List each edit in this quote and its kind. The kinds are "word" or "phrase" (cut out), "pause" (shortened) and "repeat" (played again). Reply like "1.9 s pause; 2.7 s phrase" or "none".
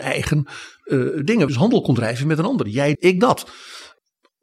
1.5 s phrase; 2.9 s word